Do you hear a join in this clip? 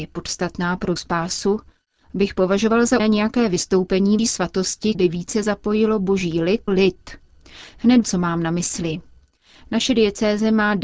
yes; 6 cuts; at 1.0 s, 3.0 s, 4.2 s, 4.9 s, 6.7 s, 8.0 s

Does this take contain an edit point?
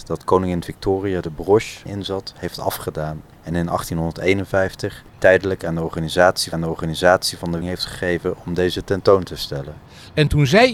yes; 5 cuts; at 1.9 s, 3.3 s, 5.1 s, 6.5 s, 7.6 s

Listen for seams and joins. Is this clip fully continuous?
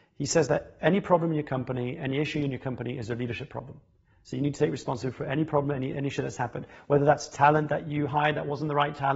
yes; 0 cuts

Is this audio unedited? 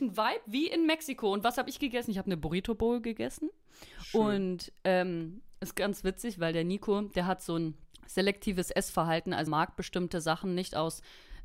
no; 3 cuts; at 3.9 s, 7.9 s, 9.5 s

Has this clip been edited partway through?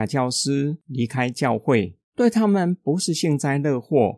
yes; 1 cut; at 2.0 s

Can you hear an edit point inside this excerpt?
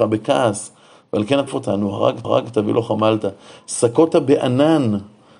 yes; 2 cuts; at 1.5 s, 2.2 s

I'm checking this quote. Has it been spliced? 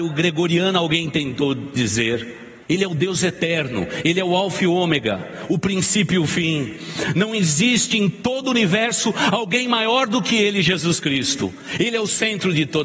yes; 1 cut; at 2.6 s

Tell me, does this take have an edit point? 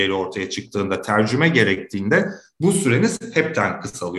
no; 0 cuts

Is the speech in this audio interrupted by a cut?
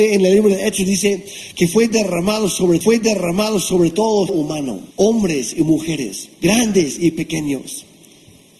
yes; 4 cuts; at 2.8 s, 4.3 s, 4.9 s, 6.3 s

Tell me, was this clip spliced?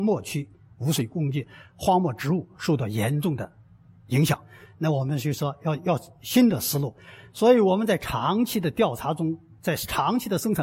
no; 0 cuts

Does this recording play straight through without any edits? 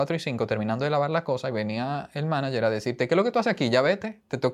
yes; 0 cuts

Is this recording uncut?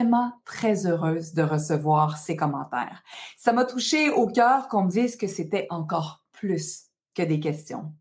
yes; 0 cuts

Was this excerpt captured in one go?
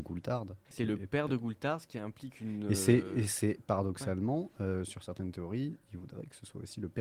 yes; 0 cuts

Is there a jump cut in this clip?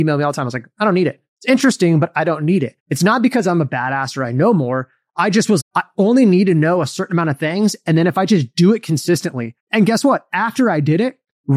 yes; 4 cuts; at 1.3 s, 2.8 s, 5.6 s, 9.6 s

